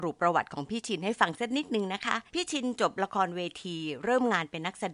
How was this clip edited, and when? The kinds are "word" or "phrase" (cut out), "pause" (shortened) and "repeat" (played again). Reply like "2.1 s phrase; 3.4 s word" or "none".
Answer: 2.3 s pause